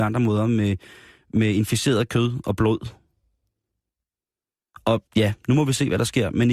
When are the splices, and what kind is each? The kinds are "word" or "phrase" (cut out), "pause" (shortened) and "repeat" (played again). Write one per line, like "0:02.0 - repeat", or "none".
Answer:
0:05.1 - pause